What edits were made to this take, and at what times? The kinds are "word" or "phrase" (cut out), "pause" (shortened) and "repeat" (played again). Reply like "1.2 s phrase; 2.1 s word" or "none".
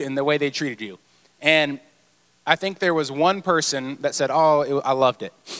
none